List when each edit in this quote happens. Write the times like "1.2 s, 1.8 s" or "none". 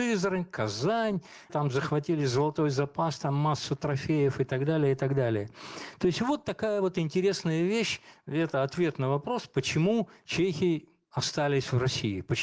1.5 s